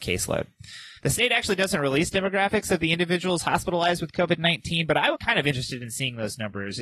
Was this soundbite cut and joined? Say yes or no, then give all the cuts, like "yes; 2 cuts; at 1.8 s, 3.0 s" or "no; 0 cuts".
yes; 2 cuts; at 1.0 s, 5.1 s